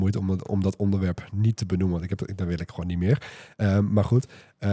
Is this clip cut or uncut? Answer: uncut